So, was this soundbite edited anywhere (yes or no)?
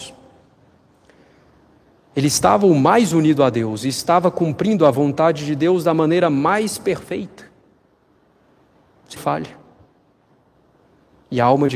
yes